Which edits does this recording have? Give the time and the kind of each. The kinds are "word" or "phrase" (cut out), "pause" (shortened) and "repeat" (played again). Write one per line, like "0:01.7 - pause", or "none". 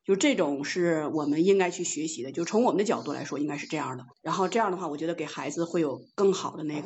0:04.1 - pause